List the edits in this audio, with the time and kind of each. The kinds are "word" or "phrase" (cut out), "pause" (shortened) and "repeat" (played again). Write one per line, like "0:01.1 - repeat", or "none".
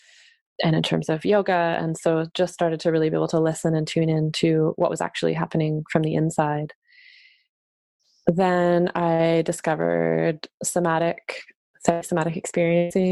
none